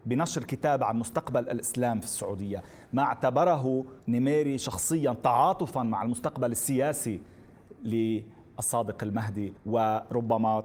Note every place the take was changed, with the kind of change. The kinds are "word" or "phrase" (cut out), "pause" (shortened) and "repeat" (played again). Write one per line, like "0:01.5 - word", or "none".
0:04.0 - pause
0:09.6 - pause